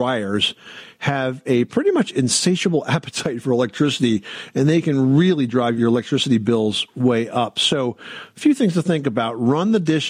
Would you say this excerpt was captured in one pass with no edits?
yes; 0 cuts

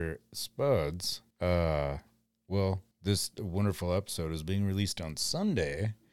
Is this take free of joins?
no; 2 cuts; at 1.3 s, 2.9 s

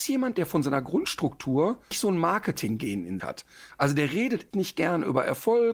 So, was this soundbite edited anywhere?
yes; 3 cuts; at 1.9 s, 3.2 s, 4.5 s

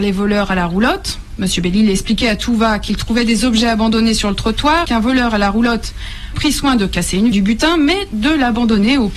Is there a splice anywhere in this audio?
yes; 3 cuts; at 4.8 s, 6.3 s, 7.3 s

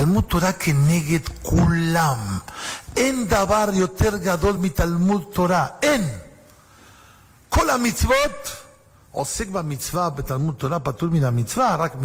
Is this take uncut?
yes; 0 cuts

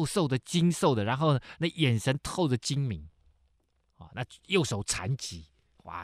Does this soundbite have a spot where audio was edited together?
no; 0 cuts

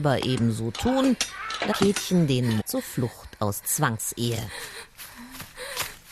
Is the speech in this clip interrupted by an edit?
yes; 3 cuts; at 1.7 s, 2.6 s, 3.6 s

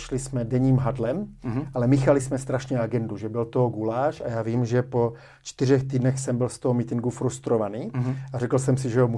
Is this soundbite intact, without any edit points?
yes; 0 cuts

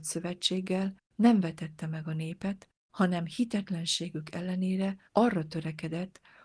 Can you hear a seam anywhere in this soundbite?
yes; 3 cuts; at 1.0 s, 2.8 s, 5.1 s

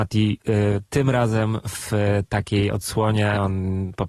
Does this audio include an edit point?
no; 0 cuts

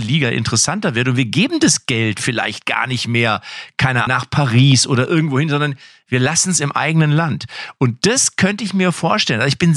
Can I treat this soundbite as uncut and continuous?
no; 1 cut; at 4.1 s

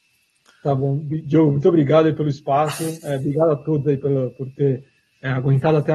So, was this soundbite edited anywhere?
no; 0 cuts

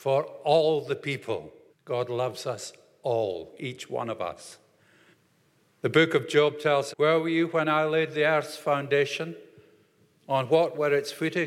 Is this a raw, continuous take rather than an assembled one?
no; 3 cuts; at 1.7 s, 5.1 s, 6.9 s

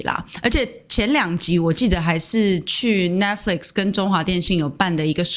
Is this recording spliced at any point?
no; 0 cuts

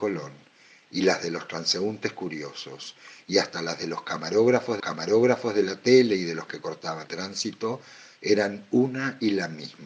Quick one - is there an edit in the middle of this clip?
yes; 3 cuts; at 4.8 s, 6.5 s, 7.0 s

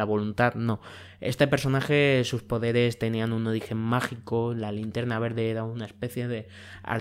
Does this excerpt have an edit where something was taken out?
no; 0 cuts

